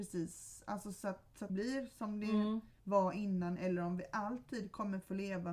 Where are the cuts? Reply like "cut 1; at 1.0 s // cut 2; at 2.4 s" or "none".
cut 1; at 1.5 s // cut 2; at 2.8 s